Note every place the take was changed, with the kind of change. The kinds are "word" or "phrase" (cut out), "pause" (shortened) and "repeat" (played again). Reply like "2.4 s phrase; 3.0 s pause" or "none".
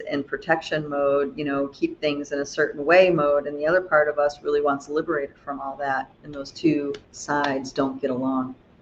6.1 s pause; 7.0 s pause